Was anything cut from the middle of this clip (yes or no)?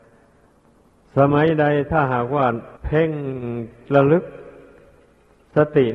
yes